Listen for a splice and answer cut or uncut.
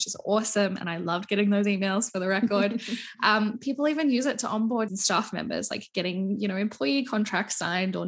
cut